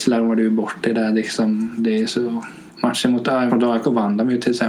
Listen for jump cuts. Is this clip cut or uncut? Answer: cut